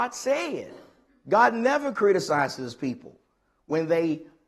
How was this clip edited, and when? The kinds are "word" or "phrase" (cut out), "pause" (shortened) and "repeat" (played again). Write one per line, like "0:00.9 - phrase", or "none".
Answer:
0:01.1 - pause